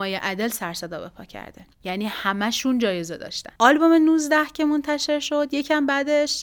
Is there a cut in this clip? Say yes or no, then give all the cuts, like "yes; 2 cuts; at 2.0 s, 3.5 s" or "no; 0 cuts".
yes; 2 cuts; at 1.7 s, 3.6 s